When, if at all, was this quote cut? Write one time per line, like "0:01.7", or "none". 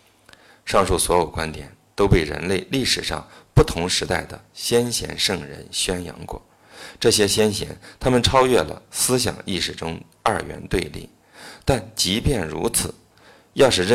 none